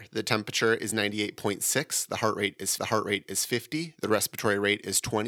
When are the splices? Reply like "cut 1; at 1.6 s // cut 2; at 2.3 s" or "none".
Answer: cut 1; at 2.8 s